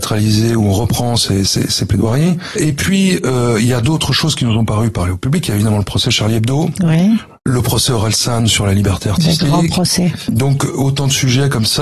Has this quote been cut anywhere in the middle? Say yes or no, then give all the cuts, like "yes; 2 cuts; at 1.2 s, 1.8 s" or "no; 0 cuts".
no; 0 cuts